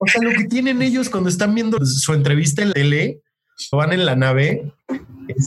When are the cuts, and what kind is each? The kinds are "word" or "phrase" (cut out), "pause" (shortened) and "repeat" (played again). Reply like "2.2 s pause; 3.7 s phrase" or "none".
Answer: 1.8 s word; 2.7 s word; 3.7 s word